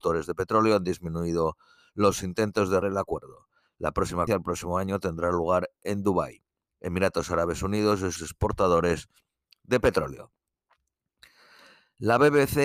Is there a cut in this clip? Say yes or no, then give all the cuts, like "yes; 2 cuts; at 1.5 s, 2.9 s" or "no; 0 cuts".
yes; 3 cuts; at 2.8 s, 4.3 s, 8.2 s